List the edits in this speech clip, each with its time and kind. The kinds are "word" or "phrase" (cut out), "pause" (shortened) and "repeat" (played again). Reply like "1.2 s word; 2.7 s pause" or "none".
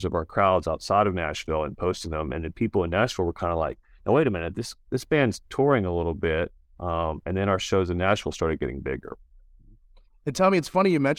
none